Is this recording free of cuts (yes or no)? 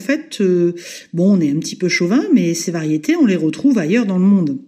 yes